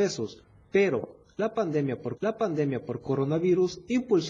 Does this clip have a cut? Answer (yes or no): yes